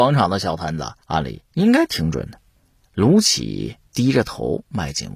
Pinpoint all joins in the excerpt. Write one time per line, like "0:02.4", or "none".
0:01.0
0:02.6